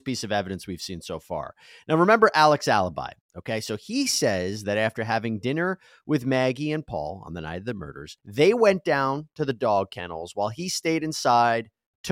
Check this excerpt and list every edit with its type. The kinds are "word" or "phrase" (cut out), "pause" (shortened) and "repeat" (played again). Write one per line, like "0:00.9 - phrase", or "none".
none

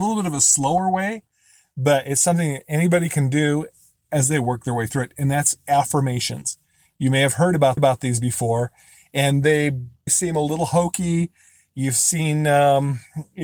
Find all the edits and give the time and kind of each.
0:07.8 - repeat
0:10.1 - word

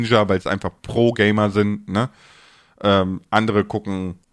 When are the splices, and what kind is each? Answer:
none

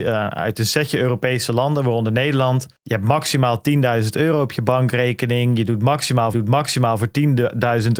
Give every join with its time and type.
0:02.8 - pause
0:06.3 - repeat

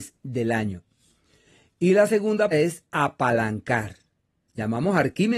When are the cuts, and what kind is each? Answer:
0:02.5 - word

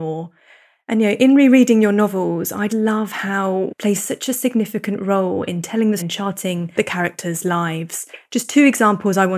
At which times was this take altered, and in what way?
0:02.7 - word
0:03.7 - word
0:06.0 - word
0:06.8 - word

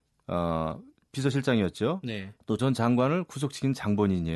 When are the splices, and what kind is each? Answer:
0:02.6 - word

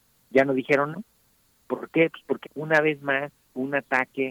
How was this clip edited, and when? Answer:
0:00.9 - word
0:02.4 - word

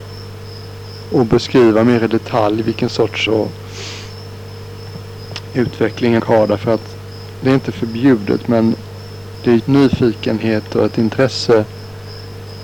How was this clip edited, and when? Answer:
0:01.1 - word
0:03.3 - word
0:06.2 - word
0:09.6 - phrase

